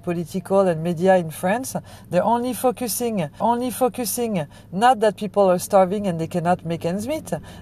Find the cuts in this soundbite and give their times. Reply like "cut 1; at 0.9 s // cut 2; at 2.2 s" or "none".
cut 1; at 3.4 s